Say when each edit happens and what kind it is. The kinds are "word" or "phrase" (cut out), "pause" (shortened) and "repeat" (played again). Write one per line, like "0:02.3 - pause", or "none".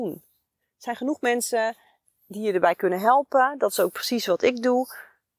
none